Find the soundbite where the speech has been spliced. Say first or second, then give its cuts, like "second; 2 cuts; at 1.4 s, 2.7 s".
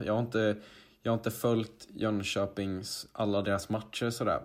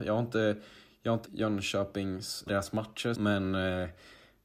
second; 3 cuts; at 1.2 s, 2.5 s, 3.1 s